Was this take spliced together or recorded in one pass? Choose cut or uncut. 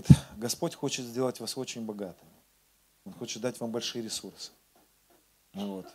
uncut